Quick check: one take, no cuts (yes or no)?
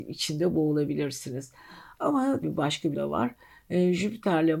no